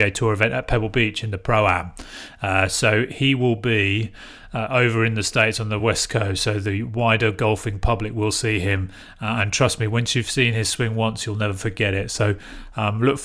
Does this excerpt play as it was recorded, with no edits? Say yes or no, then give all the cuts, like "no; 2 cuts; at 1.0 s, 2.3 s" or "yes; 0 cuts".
yes; 0 cuts